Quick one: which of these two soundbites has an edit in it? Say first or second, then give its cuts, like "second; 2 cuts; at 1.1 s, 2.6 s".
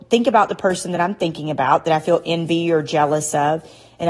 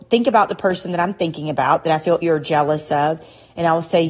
second; 1 cut; at 2.2 s